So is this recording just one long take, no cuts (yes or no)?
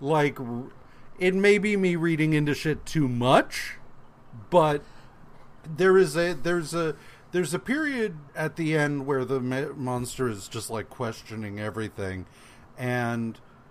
no